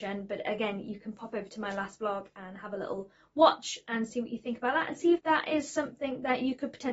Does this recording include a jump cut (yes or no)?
yes